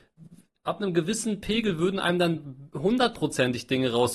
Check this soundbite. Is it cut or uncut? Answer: uncut